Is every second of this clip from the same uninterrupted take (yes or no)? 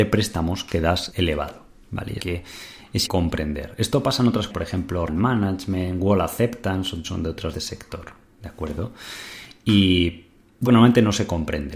no